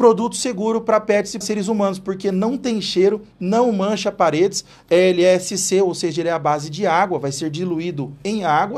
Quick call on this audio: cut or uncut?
cut